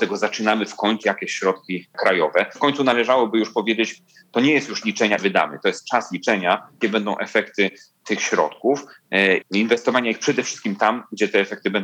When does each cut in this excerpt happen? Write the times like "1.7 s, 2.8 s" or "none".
1.0 s, 2.6 s, 4.8 s, 5.2 s, 6.8 s, 9.4 s